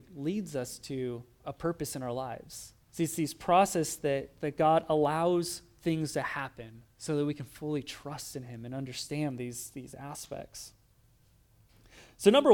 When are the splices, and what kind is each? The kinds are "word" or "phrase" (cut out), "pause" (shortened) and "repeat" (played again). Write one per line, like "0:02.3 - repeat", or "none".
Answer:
0:02.8 - pause
0:06.9 - pause